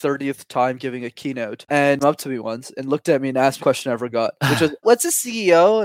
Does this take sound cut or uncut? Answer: cut